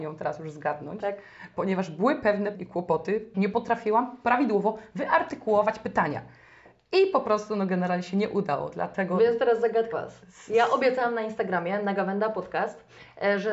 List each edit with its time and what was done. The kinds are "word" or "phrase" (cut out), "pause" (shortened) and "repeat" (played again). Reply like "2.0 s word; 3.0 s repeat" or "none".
2.5 s word; 3.3 s word; 9.9 s word